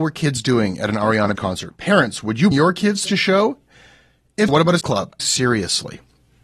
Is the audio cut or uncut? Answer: cut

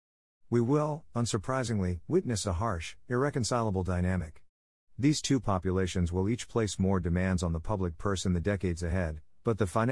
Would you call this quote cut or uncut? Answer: uncut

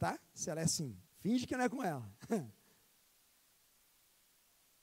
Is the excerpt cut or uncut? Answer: cut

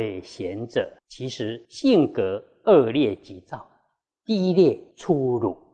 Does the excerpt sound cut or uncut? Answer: cut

